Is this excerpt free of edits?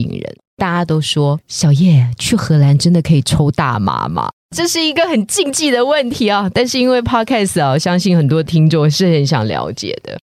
yes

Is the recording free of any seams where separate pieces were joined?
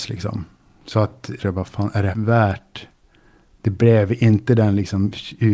no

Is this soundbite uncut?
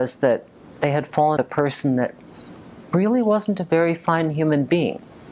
no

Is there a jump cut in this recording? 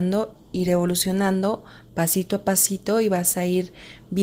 no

